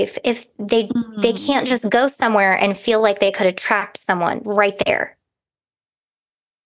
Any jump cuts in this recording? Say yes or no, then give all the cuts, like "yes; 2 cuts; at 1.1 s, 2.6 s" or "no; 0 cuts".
no; 0 cuts